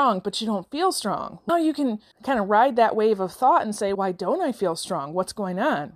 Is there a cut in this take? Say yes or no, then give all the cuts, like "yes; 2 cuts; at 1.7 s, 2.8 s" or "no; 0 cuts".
yes; 3 cuts; at 1.5 s, 2.1 s, 3.9 s